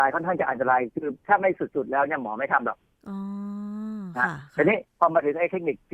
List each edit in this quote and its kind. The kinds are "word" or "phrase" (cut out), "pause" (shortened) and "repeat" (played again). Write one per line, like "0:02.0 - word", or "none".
0:04.9 - pause